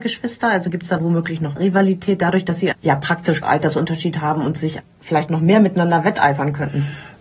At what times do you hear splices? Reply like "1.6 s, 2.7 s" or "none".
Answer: 1.6 s, 2.7 s, 3.4 s, 4.8 s